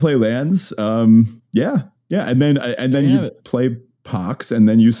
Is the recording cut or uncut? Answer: uncut